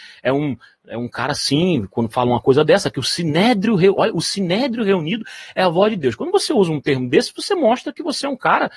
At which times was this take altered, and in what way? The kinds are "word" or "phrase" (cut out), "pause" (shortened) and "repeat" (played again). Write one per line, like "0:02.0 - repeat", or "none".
none